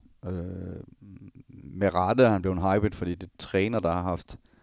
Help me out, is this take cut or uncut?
cut